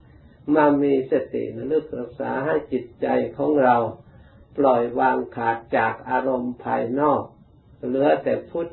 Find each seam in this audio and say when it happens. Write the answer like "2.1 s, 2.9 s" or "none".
none